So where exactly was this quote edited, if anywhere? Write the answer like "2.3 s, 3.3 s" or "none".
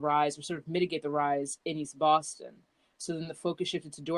none